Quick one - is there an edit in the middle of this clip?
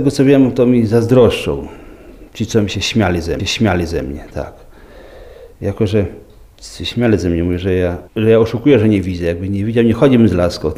yes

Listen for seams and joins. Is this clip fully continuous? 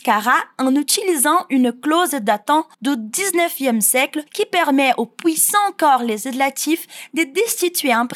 no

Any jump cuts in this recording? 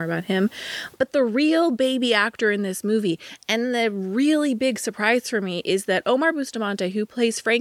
no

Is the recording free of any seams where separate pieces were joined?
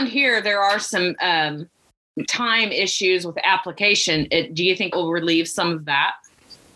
no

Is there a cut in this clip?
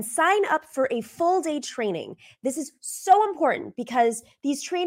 no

